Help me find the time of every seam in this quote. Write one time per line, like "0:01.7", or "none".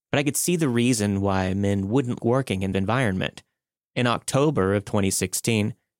0:02.2
0:02.7
0:03.8

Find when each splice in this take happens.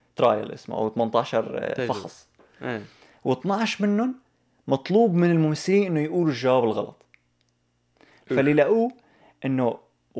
none

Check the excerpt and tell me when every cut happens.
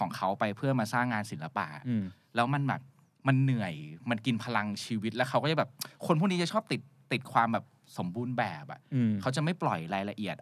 none

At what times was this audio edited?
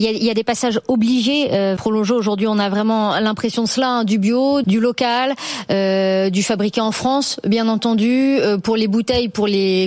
0:01.8
0:04.6

